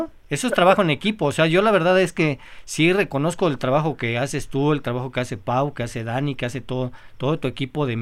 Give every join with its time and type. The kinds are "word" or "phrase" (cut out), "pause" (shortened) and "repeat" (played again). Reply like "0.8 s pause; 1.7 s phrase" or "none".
none